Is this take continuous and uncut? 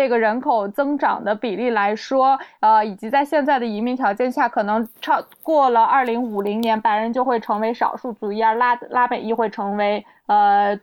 no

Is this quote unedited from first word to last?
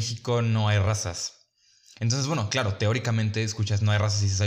yes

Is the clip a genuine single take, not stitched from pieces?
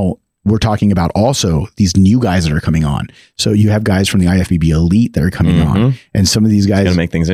yes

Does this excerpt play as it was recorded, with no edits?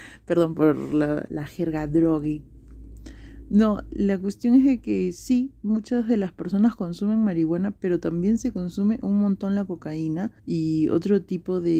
no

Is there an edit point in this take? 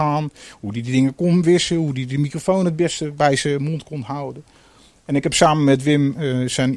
no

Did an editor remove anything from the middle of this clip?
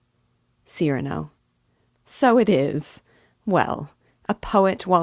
no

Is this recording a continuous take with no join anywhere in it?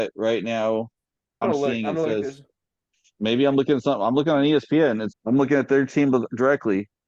no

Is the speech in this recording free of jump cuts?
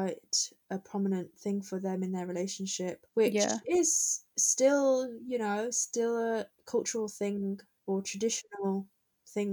yes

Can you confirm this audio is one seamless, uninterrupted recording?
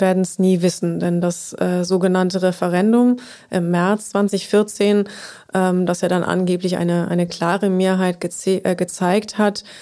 yes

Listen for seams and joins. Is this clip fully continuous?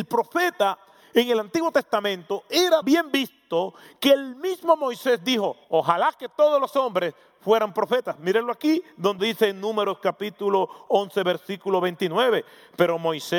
no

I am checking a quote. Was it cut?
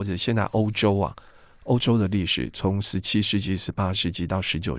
no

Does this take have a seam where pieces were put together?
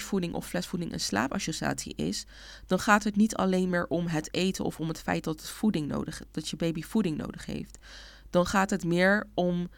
no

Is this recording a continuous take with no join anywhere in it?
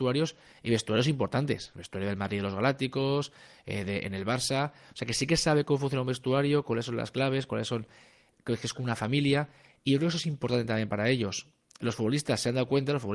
yes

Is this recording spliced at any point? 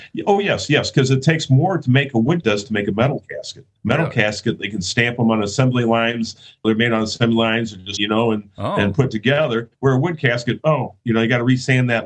yes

